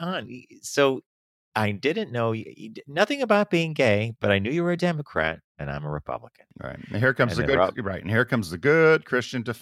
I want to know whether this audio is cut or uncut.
uncut